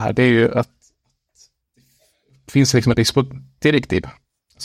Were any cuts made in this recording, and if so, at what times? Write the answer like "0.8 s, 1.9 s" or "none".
2.9 s